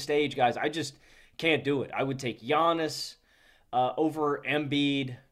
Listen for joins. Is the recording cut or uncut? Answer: uncut